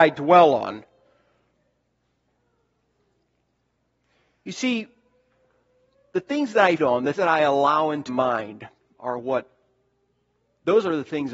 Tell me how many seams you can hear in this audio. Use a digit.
3